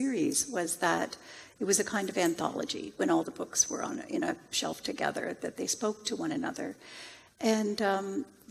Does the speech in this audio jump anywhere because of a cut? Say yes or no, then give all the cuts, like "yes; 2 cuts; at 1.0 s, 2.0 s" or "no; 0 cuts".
no; 0 cuts